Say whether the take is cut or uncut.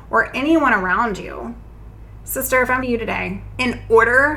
cut